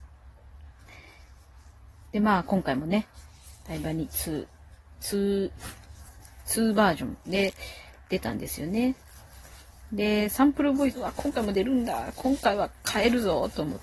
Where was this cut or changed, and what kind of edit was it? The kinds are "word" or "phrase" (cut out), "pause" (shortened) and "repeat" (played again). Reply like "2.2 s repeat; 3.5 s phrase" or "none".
10.9 s phrase